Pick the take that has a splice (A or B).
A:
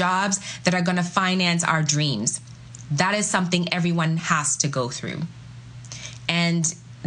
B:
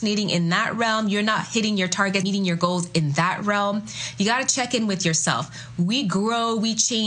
B